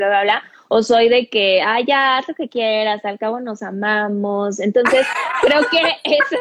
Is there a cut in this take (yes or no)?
no